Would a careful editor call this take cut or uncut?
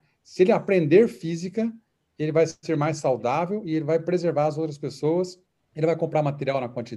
cut